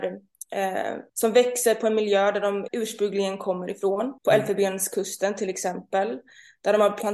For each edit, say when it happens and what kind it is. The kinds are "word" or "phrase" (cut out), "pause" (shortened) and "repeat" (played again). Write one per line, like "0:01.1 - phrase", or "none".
0:01.1 - pause
0:02.7 - word
0:04.2 - pause

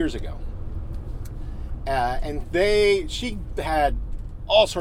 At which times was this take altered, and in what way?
none

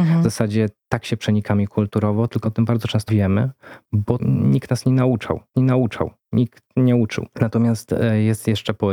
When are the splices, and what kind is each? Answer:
0:02.4 - word
0:03.1 - word
0:04.2 - word
0:05.5 - repeat
0:07.3 - pause

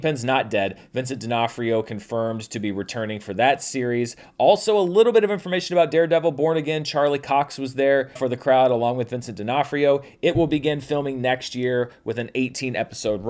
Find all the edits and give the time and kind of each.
0:08.2 - word

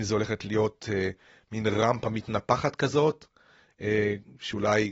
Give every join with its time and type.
none

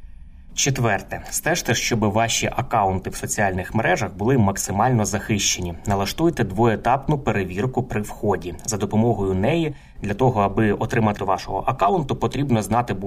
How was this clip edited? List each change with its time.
0:11.2 - word

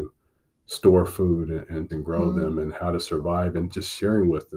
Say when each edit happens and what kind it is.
0:01.9 - phrase

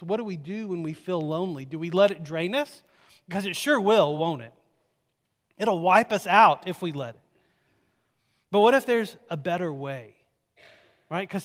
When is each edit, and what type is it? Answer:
none

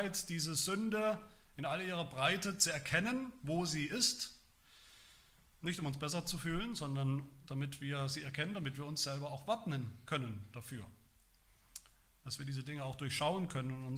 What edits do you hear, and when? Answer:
none

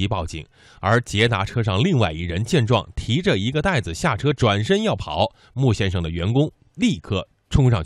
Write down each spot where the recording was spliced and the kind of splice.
none

